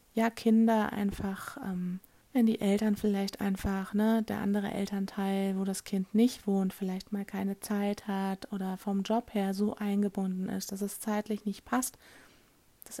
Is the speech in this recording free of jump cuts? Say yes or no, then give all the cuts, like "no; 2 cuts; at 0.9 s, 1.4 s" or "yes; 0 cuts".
no; 1 cut; at 2.2 s